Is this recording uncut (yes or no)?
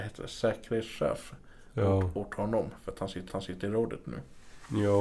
no